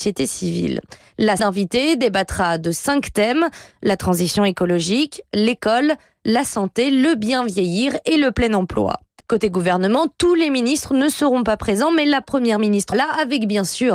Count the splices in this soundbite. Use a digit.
3